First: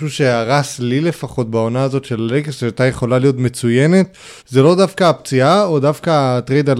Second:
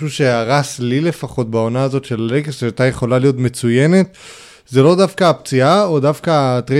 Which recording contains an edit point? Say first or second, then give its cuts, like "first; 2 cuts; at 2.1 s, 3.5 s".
first; 1 cut; at 4.4 s